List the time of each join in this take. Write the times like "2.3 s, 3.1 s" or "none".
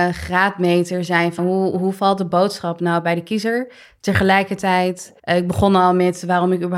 1.4 s, 5.2 s